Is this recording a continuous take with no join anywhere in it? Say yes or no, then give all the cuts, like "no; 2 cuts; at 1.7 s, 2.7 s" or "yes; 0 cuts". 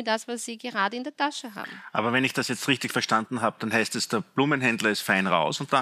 yes; 0 cuts